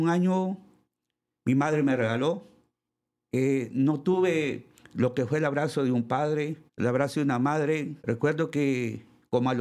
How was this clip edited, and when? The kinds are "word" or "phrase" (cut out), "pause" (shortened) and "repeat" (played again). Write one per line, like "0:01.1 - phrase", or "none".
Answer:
0:02.9 - pause
0:04.8 - pause
0:06.7 - pause
0:08.0 - pause